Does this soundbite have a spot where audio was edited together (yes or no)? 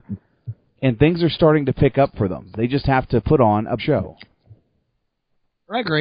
yes